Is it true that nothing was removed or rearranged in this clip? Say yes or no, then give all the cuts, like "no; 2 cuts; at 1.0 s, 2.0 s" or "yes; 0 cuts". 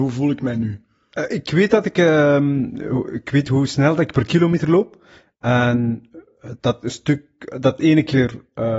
yes; 0 cuts